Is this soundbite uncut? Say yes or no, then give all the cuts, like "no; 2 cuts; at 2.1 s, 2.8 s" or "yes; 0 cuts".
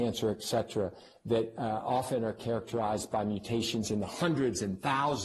yes; 0 cuts